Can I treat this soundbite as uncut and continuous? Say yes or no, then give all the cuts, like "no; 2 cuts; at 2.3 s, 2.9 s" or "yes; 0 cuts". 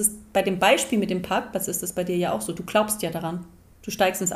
yes; 0 cuts